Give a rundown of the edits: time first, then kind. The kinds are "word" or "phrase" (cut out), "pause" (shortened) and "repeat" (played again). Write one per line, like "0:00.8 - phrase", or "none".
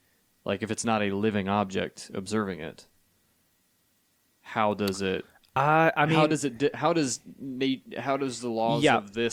none

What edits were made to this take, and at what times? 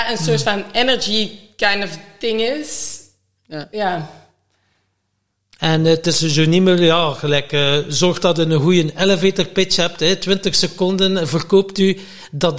none

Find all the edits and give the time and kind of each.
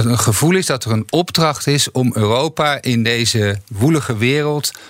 none

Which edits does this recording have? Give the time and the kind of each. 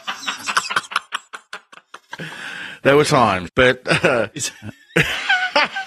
0:03.0 - word
0:03.5 - word

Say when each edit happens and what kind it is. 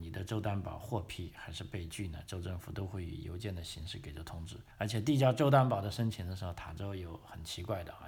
0:04.7 - pause

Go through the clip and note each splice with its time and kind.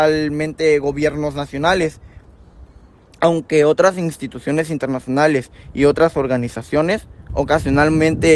none

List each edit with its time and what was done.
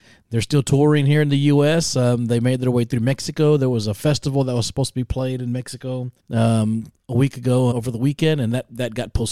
0:06.2 - pause
0:07.7 - word

